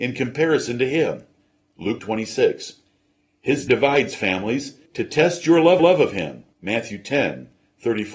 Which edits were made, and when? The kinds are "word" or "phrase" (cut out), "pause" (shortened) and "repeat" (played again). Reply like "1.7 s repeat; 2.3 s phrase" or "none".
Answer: 2.0 s word; 3.7 s word; 4.9 s pause; 5.8 s repeat; 6.5 s pause